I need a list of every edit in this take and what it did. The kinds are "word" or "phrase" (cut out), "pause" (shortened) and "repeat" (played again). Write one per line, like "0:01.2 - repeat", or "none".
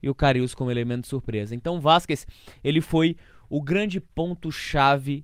none